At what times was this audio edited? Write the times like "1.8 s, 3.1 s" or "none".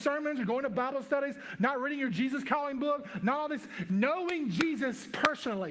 none